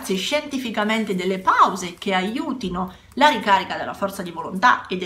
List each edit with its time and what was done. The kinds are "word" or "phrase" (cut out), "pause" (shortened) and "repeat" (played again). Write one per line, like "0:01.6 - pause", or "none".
none